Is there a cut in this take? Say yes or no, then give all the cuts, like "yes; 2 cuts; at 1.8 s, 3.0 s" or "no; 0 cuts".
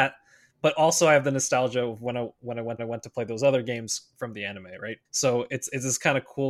yes; 2 cuts; at 2.8 s, 5.0 s